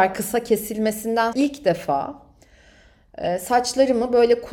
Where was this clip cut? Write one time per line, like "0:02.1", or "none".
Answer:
0:01.3

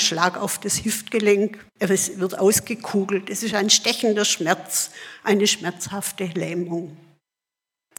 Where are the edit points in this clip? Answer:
0:01.7

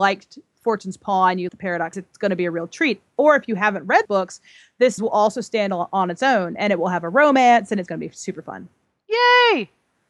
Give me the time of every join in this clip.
0:01.5
0:01.9
0:04.0
0:05.0
0:07.9

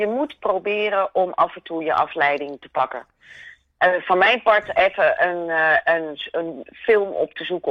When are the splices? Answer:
none

